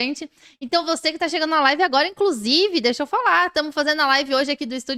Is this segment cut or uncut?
uncut